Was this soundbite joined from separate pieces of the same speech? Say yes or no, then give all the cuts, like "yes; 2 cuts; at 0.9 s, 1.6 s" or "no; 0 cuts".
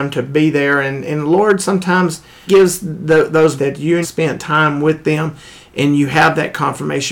yes; 3 cuts; at 2.5 s, 3.6 s, 4.0 s